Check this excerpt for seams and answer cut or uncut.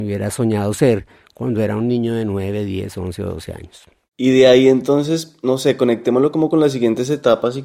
uncut